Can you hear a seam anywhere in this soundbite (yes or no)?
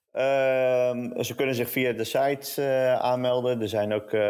no